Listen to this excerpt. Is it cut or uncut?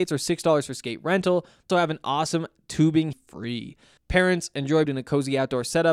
cut